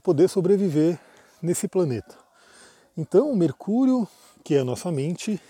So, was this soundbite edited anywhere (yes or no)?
no